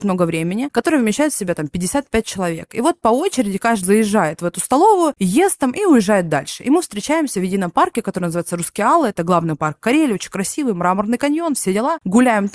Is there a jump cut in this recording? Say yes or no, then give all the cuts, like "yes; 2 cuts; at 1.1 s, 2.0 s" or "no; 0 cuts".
yes; 1 cut; at 3.8 s